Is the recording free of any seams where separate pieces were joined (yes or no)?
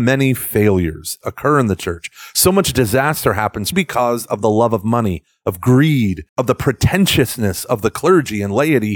no